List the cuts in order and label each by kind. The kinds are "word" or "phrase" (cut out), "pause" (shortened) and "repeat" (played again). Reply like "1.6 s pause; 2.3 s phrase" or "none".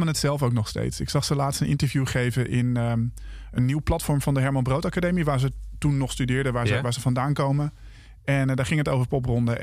none